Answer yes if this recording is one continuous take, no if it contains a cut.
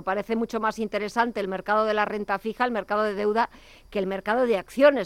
yes